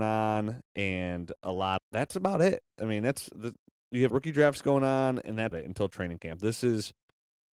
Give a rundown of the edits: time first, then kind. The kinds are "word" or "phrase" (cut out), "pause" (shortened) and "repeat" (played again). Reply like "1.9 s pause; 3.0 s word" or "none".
1.8 s word; 4.1 s word; 5.5 s word